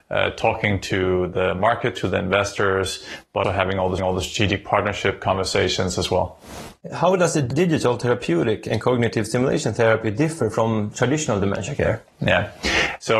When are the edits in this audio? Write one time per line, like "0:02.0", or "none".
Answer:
0:03.4
0:04.0